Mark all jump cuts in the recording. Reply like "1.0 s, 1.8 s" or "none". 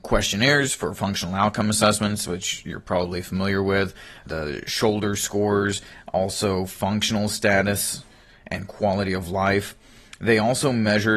none